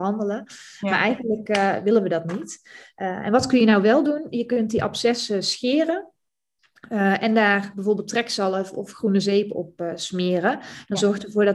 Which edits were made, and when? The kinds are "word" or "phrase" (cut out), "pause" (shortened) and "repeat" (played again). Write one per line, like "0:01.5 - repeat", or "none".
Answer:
none